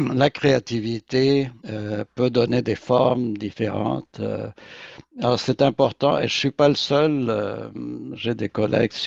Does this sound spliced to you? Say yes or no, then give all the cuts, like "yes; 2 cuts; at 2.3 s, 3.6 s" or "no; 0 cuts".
yes; 1 cut; at 1.6 s